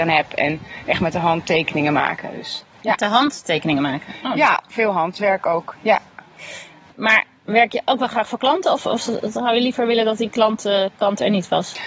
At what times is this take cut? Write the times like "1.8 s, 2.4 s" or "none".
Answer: none